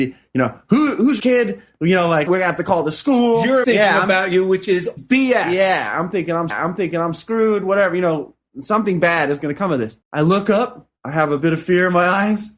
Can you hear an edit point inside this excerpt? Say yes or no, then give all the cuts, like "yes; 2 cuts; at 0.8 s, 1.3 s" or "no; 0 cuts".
yes; 7 cuts; at 1.2 s, 2.3 s, 3.6 s, 5.0 s, 6.5 s, 10.0 s, 11.0 s